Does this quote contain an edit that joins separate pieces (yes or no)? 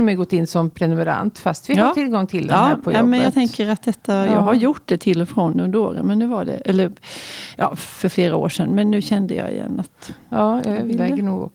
no